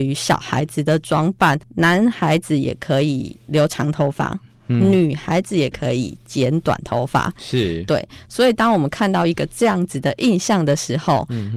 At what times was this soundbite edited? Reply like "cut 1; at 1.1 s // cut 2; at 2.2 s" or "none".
cut 1; at 1.6 s